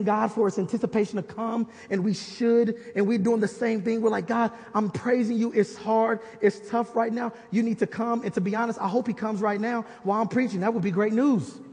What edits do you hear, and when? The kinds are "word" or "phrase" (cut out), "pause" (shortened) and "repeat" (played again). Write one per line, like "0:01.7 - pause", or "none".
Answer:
none